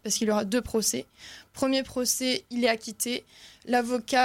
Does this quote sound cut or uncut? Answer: uncut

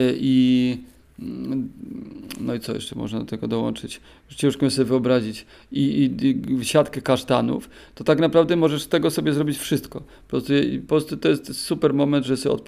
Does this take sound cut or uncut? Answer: uncut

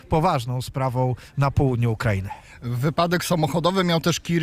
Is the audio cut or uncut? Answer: uncut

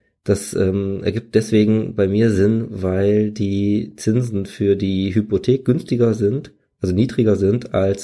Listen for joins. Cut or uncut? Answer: uncut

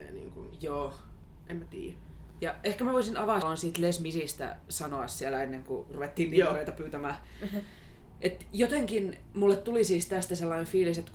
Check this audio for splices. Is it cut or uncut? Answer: cut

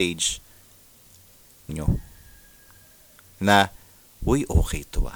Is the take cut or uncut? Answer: cut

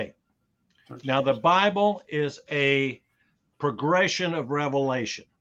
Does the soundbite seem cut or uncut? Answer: cut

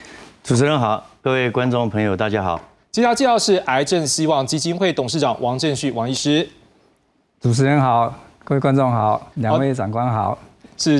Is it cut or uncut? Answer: cut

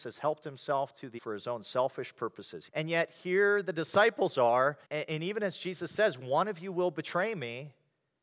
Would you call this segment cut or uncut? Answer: cut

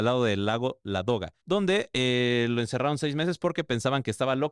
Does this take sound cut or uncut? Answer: cut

